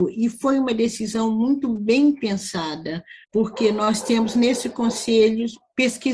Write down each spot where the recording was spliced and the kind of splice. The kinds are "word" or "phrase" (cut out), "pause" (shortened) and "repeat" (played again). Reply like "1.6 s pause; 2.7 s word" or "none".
3.2 s pause